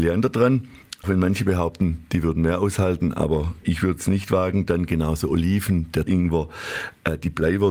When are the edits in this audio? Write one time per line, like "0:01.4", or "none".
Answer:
0:01.0
0:03.6
0:06.1